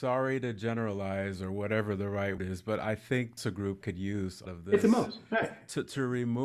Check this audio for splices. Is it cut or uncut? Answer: cut